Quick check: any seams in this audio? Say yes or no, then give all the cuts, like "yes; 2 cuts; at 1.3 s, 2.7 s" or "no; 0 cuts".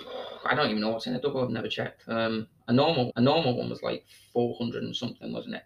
yes; 1 cut; at 3.1 s